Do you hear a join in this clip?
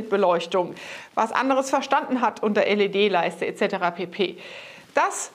no; 0 cuts

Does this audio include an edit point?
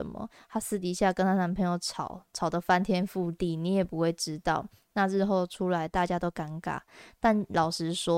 no; 0 cuts

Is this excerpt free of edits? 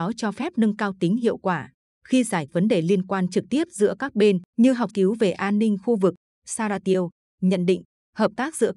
no; 3 cuts; at 2.5 s, 4.5 s, 4.9 s

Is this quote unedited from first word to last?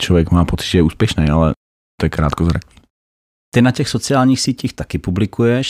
yes; 0 cuts

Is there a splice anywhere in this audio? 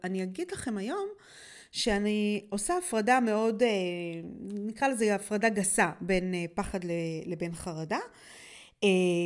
no; 0 cuts

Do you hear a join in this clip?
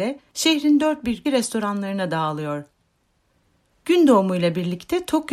yes; 1 cut; at 1.2 s

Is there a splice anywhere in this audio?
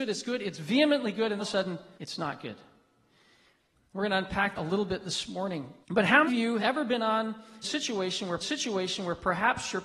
yes; 8 cuts; at 1.4 s, 2.0 s, 4.6 s, 5.8 s, 6.3 s, 6.6 s, 7.6 s, 8.4 s

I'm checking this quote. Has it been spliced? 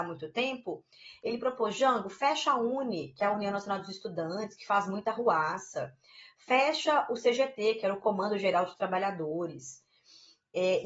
no; 0 cuts

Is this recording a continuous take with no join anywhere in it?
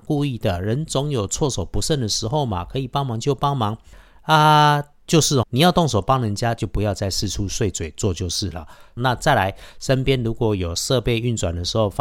no; 1 cut; at 5.4 s

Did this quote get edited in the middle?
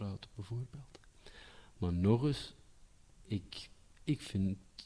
no; 0 cuts

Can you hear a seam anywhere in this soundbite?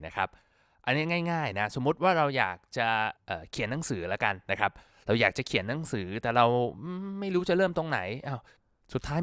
yes; 1 cut; at 3.2 s

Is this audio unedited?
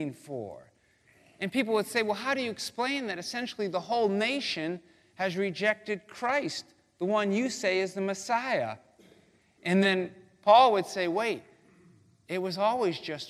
yes; 0 cuts

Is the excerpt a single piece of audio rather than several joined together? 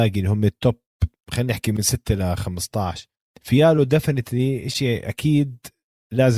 no; 1 cut; at 3.3 s

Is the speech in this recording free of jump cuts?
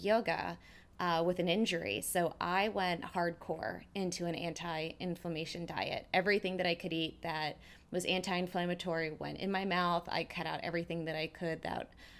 yes; 0 cuts

